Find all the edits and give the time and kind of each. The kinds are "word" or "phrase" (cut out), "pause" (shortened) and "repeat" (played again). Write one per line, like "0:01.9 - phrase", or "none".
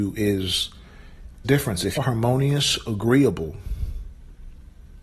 0:01.4 - phrase
0:02.0 - word